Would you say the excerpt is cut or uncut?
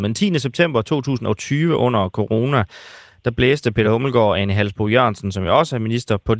uncut